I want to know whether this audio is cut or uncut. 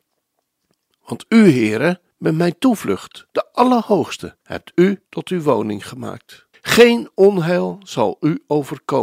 cut